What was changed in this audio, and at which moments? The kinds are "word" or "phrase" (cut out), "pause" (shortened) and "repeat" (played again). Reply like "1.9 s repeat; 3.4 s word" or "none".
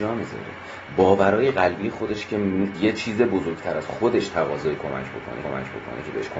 2.7 s word; 5.4 s repeat